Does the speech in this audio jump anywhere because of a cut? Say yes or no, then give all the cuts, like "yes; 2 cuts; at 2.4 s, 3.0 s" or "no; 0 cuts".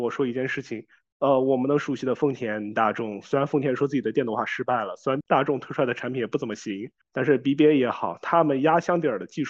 no; 0 cuts